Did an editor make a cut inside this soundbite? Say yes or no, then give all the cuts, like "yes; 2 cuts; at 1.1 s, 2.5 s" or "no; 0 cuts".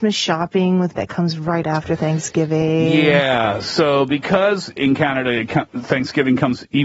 yes; 2 cuts; at 1.0 s, 4.8 s